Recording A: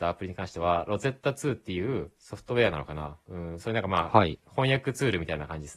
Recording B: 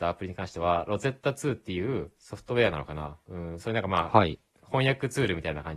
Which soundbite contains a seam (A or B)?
A